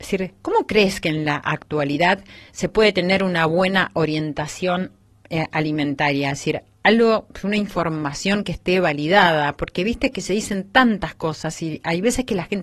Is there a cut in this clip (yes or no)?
no